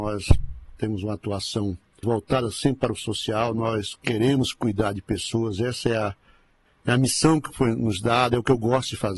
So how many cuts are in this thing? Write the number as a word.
one